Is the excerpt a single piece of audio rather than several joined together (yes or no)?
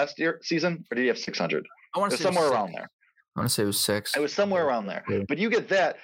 yes